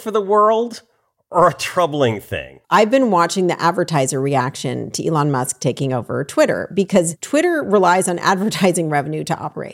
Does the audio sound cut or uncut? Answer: cut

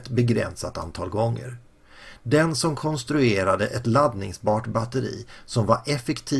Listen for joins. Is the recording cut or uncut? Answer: uncut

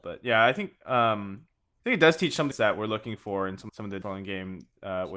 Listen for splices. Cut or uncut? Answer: cut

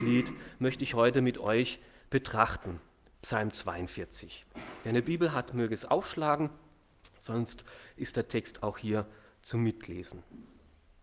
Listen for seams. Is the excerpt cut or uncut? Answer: uncut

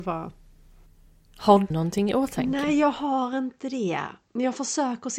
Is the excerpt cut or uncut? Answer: cut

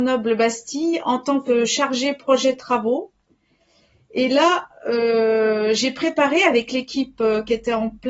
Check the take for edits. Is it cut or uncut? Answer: uncut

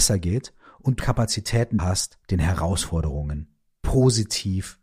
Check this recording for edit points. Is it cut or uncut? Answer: cut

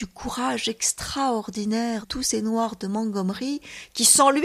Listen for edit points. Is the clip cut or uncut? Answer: cut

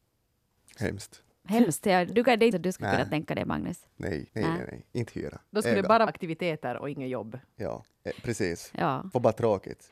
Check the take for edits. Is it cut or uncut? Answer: cut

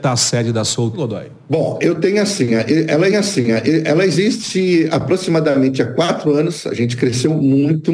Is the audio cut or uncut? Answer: cut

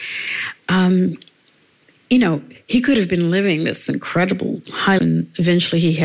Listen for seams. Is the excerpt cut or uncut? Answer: cut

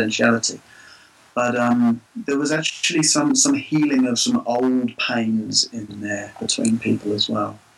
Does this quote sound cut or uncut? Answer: cut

